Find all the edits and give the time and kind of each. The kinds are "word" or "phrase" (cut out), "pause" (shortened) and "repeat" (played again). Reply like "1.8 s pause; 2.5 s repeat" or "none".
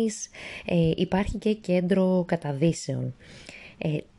none